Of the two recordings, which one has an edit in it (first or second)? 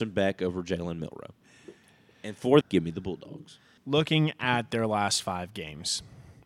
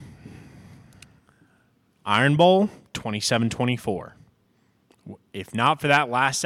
first